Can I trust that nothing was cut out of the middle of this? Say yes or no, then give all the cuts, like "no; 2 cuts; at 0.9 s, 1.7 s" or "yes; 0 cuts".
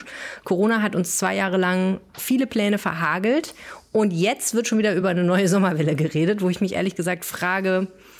yes; 0 cuts